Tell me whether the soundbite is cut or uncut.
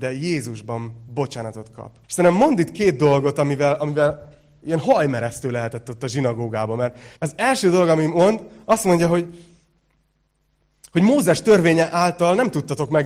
cut